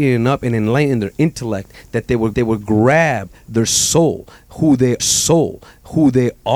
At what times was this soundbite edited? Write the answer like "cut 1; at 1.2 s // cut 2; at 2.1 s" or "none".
cut 1; at 2.3 s // cut 2; at 5.0 s